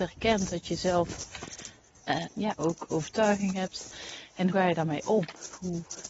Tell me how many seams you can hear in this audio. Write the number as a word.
three